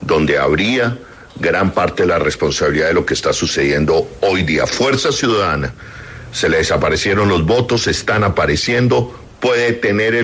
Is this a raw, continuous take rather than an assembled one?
yes; 0 cuts

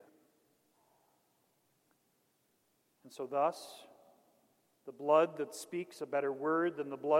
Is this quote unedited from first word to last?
yes; 0 cuts

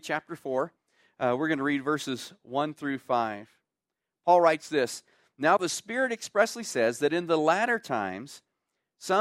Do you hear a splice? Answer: no; 0 cuts

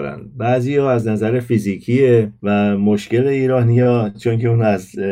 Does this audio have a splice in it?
no; 0 cuts

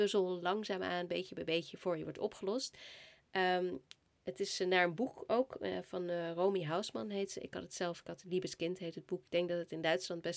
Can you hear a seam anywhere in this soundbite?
no; 0 cuts

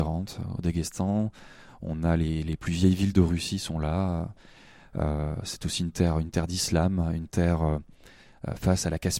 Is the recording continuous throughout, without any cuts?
yes; 0 cuts

